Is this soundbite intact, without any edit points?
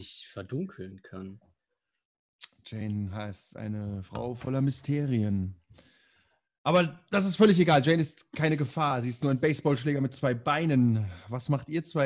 yes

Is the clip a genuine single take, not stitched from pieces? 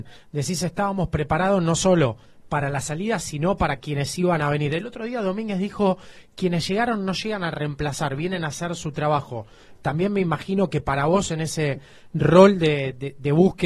yes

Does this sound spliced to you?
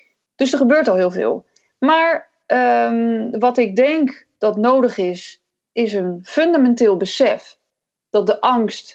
no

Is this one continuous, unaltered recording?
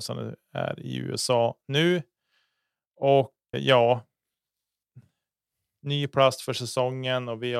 no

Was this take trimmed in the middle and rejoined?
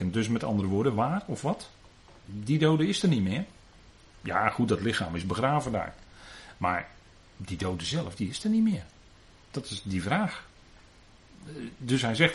no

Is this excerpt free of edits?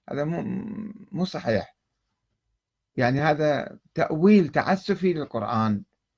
yes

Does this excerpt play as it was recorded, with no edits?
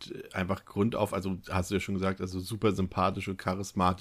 yes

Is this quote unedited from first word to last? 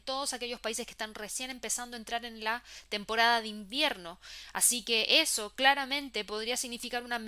yes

